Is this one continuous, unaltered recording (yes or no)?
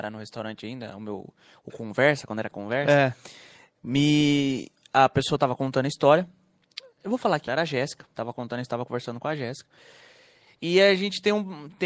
no